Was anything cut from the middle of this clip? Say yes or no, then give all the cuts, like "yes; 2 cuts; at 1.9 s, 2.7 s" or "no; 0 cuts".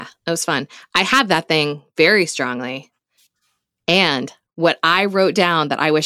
no; 0 cuts